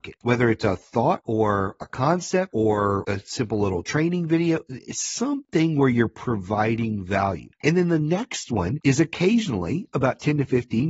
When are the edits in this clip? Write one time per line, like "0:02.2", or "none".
0:07.5